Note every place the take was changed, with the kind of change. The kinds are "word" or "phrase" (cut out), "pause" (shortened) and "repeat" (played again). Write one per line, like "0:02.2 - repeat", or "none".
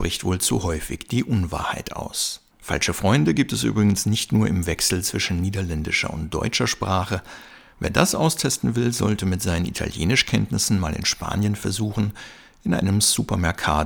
0:02.5 - pause